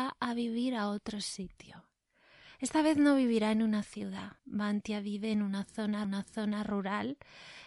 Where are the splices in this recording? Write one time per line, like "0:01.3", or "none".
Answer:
0:04.4
0:06.0